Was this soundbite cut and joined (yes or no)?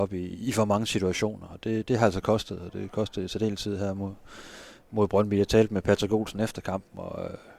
no